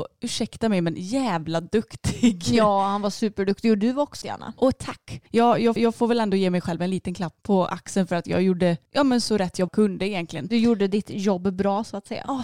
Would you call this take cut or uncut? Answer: cut